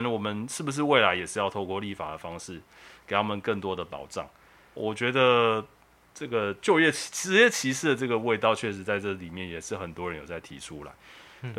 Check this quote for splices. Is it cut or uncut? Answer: uncut